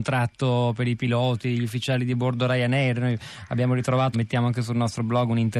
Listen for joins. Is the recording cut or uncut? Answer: cut